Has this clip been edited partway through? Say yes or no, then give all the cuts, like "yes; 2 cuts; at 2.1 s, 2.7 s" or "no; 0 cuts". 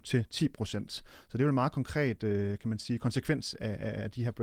no; 0 cuts